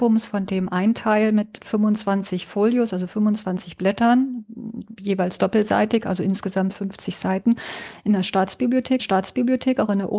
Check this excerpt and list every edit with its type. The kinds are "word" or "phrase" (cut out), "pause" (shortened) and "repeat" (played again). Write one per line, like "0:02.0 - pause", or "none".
0:09.0 - repeat